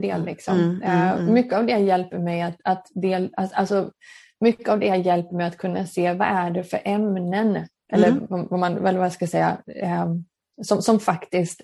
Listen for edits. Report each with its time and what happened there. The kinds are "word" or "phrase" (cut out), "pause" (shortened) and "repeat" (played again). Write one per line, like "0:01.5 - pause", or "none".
none